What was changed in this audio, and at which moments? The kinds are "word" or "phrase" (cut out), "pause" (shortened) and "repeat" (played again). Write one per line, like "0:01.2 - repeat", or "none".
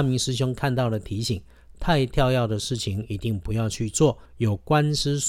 0:04.3 - pause